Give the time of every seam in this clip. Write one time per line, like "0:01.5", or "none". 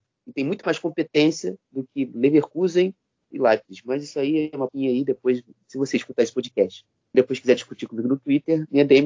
0:03.3
0:04.7
0:07.1